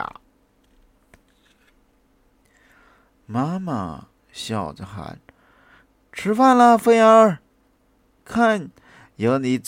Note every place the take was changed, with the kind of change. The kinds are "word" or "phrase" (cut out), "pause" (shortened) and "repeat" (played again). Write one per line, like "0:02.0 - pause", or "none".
none

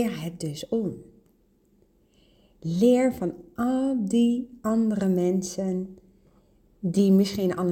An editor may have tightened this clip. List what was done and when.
none

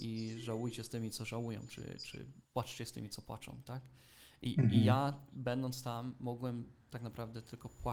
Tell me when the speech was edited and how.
0:06.8 - pause

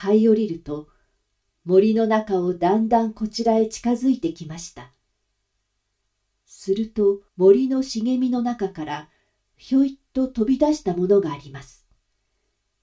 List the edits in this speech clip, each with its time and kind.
0:07.3 - pause

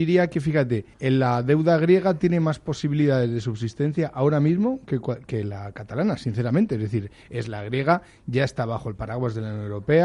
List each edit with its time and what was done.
0:00.9 - pause

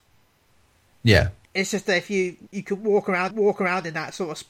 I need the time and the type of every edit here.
0:01.4 - pause
0:02.5 - word
0:03.3 - repeat

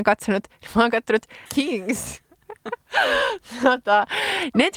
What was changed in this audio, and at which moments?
0:01.5 - word

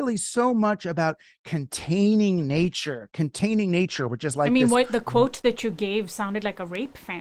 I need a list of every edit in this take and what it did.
none

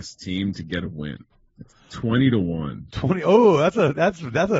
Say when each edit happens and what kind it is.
none

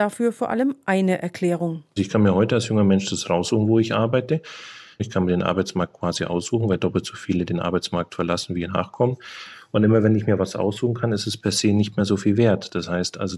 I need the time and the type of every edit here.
none

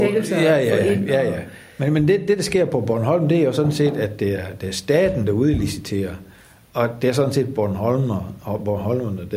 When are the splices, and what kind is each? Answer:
none

